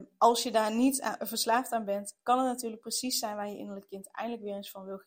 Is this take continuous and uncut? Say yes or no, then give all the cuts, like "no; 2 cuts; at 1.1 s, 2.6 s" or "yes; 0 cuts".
yes; 0 cuts